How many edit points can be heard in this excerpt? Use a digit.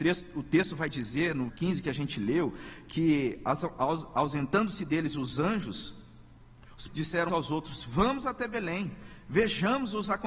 3